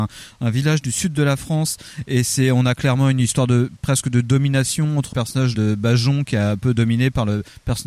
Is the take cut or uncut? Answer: cut